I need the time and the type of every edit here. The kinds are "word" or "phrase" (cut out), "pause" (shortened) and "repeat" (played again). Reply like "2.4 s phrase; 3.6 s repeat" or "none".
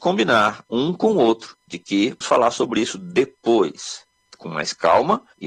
2.2 s word